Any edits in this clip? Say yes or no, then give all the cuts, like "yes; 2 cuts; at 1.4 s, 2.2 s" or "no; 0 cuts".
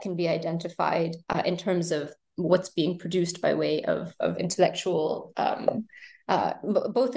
yes; 1 cut; at 1.2 s